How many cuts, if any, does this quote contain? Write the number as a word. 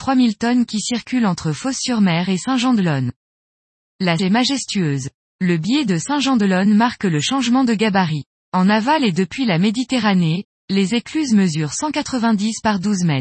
one